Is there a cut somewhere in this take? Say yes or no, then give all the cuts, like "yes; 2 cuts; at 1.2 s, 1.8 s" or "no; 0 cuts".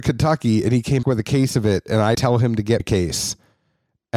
yes; 3 cuts; at 1.0 s, 2.1 s, 2.8 s